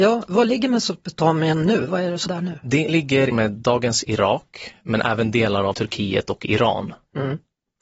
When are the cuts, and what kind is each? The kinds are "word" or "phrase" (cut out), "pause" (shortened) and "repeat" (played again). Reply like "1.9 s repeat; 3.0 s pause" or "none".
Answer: 2.3 s word; 2.9 s word; 3.3 s phrase; 5.7 s word